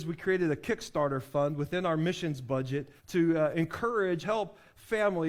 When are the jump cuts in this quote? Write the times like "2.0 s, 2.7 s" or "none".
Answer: 3.0 s, 4.2 s